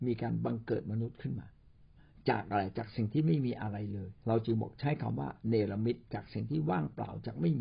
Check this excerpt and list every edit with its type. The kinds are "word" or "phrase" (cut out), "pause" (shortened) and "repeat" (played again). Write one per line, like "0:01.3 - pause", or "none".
0:02.0 - pause
0:04.2 - pause
0:06.0 - pause

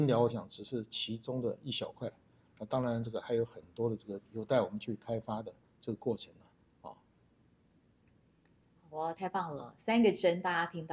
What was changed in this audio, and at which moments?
none

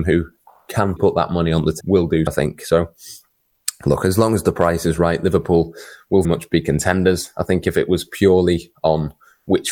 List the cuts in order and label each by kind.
0:01.0 - word
0:01.8 - word
0:02.3 - word
0:06.2 - word

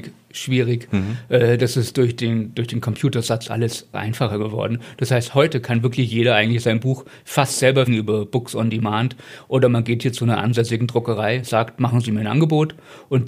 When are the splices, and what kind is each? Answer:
0:03.9 - word
0:07.9 - phrase

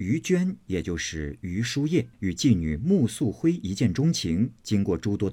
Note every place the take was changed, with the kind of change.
0:02.1 - pause

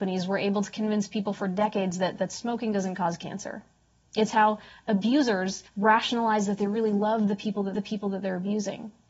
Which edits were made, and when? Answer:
0:05.7 - pause
0:07.7 - repeat

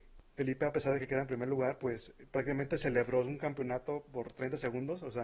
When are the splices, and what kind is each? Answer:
none

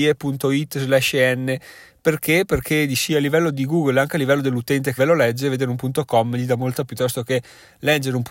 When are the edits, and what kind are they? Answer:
0:05.0 - word
0:06.9 - phrase

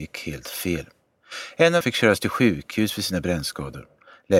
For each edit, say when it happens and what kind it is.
0:01.8 - word

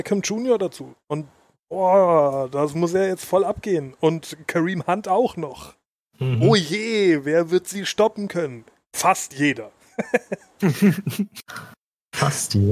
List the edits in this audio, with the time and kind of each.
none

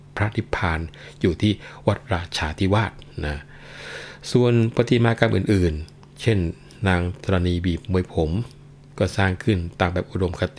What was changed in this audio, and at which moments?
none

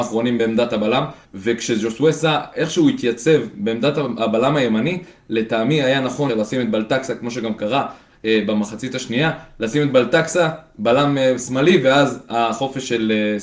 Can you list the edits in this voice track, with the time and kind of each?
0:01.2 - pause
0:06.3 - word

